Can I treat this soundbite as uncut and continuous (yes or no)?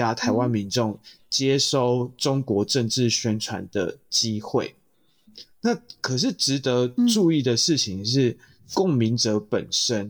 yes